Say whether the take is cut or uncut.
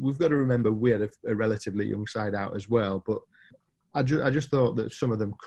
uncut